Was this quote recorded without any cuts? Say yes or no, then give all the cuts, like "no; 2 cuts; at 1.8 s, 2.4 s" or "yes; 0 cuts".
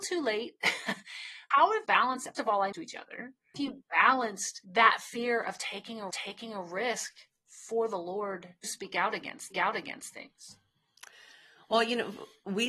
no; 9 cuts; at 1.5 s, 1.8 s, 2.3 s, 2.7 s, 3.5 s, 4.6 s, 6.1 s, 8.6 s, 9.5 s